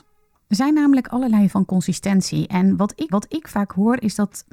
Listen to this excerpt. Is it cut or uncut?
cut